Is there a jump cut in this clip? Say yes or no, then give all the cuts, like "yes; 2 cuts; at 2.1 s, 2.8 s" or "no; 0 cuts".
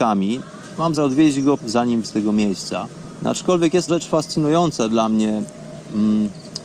yes; 4 cuts; at 1.0 s, 1.6 s, 2.0 s, 3.9 s